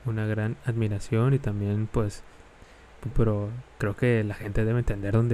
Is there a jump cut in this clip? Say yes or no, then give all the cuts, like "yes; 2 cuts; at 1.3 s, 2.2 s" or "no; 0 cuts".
yes; 1 cut; at 3.1 s